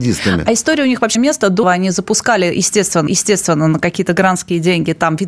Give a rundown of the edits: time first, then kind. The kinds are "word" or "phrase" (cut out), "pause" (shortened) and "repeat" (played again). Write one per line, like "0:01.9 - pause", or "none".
0:01.2 - word
0:01.6 - word
0:03.1 - repeat

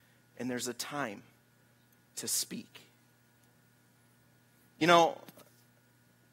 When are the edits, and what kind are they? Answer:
none

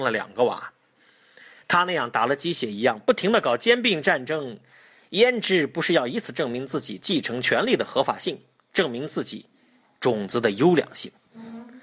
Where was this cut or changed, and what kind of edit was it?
none

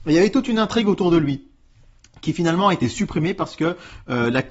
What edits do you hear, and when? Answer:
none

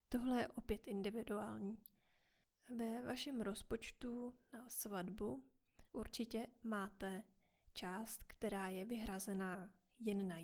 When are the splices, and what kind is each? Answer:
0:05.9 - pause

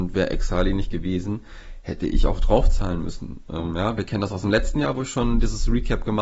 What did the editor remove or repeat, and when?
none

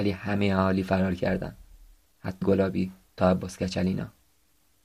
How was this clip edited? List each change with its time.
0:02.4 - word
0:03.2 - word

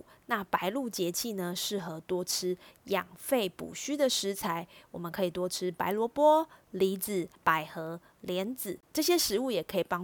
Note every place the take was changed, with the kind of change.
0:07.4 - pause
0:08.8 - pause

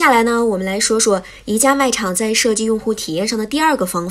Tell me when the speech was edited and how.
none

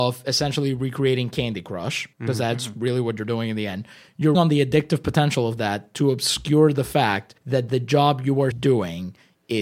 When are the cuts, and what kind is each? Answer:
0:02.1 - pause
0:04.3 - word
0:07.4 - pause
0:08.5 - word

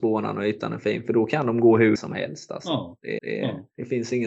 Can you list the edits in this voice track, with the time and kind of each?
0:02.0 - word
0:03.2 - repeat

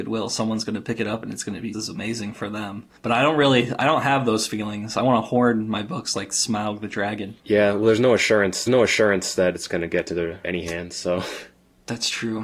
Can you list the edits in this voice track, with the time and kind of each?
0:01.7 - word
0:03.0 - pause
0:07.4 - pause
0:08.7 - repeat
0:10.4 - phrase

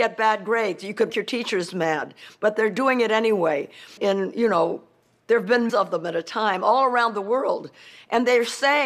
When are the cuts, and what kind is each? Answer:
0:01.1 - word
0:04.0 - word
0:05.7 - word

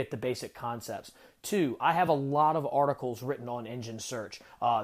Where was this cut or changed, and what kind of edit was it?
none

